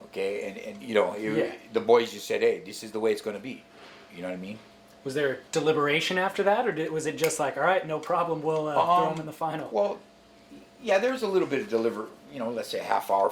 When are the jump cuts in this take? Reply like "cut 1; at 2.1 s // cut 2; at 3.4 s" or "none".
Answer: cut 1; at 5.5 s